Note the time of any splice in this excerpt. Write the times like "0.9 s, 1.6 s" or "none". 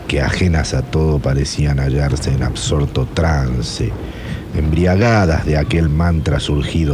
none